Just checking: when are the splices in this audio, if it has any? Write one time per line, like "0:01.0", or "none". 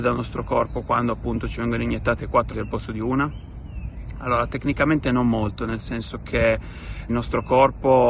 0:02.5
0:07.1